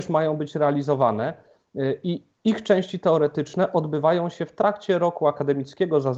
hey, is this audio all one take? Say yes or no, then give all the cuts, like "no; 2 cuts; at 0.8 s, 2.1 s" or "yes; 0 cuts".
no; 1 cut; at 2.3 s